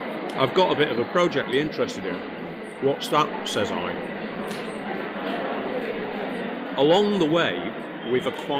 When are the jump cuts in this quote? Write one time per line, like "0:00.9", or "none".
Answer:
0:01.5